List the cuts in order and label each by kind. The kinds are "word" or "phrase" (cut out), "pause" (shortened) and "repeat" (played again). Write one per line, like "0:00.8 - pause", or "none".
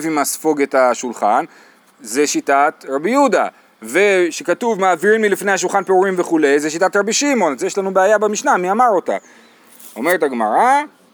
none